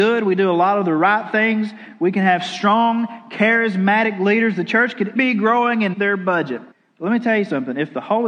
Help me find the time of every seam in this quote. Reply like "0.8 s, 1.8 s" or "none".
5.2 s, 5.9 s, 6.7 s